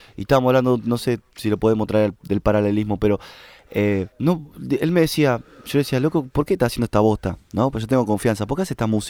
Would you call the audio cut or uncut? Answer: cut